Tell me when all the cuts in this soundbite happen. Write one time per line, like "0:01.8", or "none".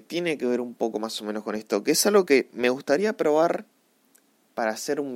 none